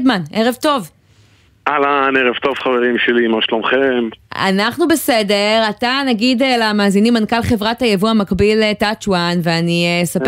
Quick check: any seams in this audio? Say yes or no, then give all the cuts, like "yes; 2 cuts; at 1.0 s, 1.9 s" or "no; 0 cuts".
no; 0 cuts